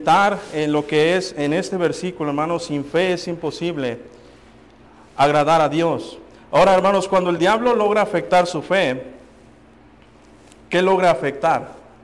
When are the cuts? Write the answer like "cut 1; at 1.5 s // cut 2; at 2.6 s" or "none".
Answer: none